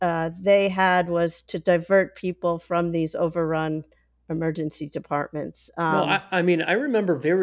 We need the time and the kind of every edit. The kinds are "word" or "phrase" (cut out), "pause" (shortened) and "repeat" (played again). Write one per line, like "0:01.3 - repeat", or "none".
none